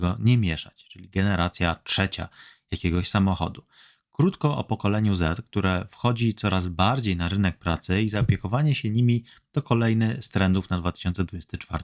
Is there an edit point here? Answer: no; 0 cuts

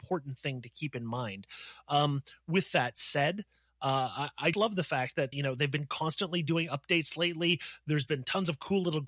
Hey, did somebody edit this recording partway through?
yes; 2 cuts; at 4.5 s, 5.3 s

